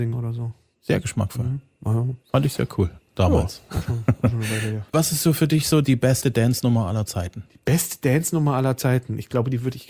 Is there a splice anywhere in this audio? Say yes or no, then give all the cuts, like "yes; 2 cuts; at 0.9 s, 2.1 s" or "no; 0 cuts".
yes; 3 cuts; at 2.2 s, 4.9 s, 5.8 s